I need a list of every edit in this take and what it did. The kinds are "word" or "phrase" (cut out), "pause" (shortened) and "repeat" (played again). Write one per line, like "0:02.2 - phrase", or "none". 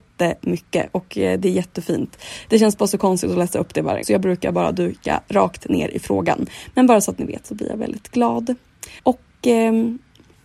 0:04.0 - word
0:09.0 - pause

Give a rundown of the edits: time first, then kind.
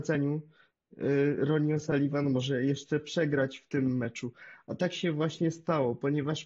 none

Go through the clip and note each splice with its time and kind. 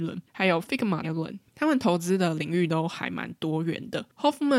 0:01.0 - phrase

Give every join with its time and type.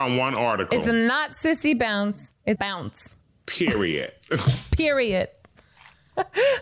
0:02.6 - word

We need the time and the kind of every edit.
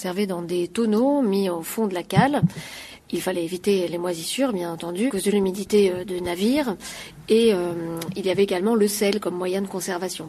0:05.1 - word

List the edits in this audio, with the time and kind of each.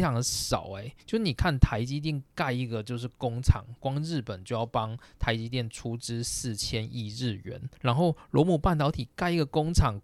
0:01.0 - pause
0:07.7 - pause

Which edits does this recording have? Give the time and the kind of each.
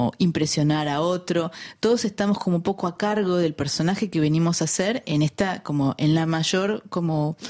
none

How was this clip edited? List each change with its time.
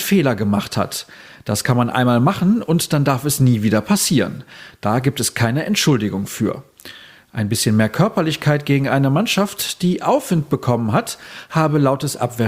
none

